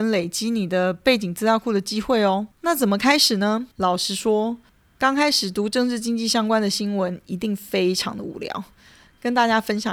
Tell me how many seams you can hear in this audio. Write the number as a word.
three